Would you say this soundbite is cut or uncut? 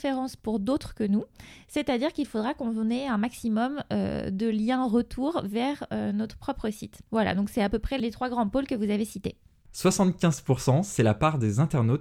cut